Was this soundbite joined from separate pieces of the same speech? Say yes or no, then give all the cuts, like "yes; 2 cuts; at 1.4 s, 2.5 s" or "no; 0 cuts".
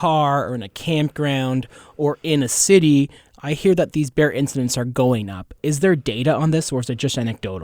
no; 0 cuts